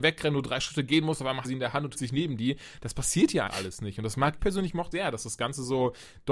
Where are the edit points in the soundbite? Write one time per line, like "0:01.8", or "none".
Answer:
0:01.4
0:01.9
0:03.5
0:04.4
0:04.9